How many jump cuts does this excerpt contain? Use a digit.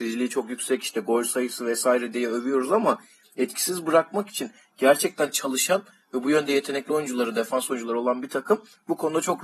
0